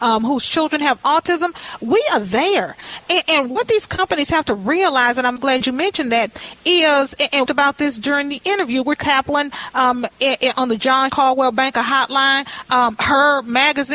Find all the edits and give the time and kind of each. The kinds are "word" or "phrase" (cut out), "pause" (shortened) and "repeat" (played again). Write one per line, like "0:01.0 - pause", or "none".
0:05.4 - word
0:07.5 - phrase
0:09.0 - phrase
0:11.1 - word